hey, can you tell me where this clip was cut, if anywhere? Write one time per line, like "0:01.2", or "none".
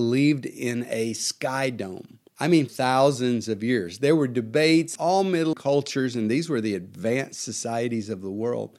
0:02.3
0:02.7
0:05.0
0:05.5